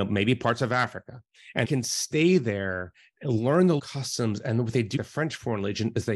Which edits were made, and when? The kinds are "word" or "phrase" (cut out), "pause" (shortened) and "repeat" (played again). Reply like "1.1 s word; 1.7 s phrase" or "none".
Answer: 1.6 s word; 3.8 s word; 5.0 s word